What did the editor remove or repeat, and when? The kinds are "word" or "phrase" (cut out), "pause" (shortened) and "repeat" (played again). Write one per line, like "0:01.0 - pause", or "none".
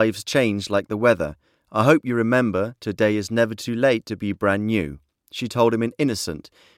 none